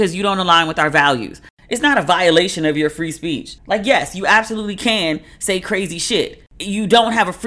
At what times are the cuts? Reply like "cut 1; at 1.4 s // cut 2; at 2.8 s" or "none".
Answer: cut 1; at 3.6 s

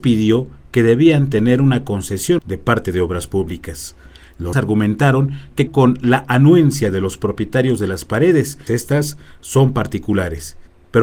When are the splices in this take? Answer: cut 1; at 2.4 s // cut 2; at 4.5 s // cut 3; at 5.7 s // cut 4; at 8.7 s

